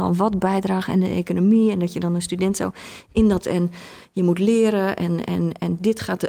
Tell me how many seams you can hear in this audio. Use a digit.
1